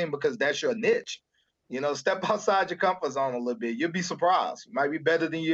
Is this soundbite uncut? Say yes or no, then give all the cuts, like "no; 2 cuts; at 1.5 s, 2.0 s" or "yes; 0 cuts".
yes; 0 cuts